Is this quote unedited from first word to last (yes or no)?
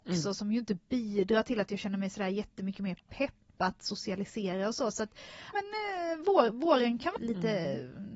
no